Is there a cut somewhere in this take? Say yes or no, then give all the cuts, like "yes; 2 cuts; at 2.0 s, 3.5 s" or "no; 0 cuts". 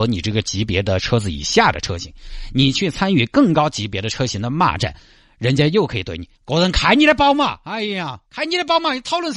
yes; 2 cuts; at 6.3 s, 8.2 s